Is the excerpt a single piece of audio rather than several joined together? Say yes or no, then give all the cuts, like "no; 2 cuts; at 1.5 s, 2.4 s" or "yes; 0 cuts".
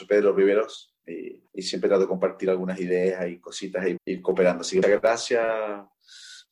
no; 3 cuts; at 1.5 s, 4.0 s, 4.8 s